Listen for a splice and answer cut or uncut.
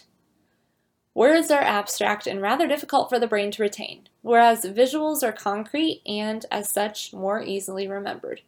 uncut